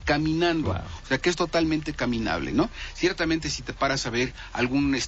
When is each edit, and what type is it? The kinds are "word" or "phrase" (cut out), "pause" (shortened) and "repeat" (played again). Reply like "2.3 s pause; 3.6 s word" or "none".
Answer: none